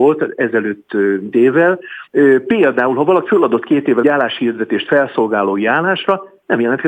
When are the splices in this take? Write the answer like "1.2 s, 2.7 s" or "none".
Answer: 1.3 s, 2.1 s, 3.3 s, 4.0 s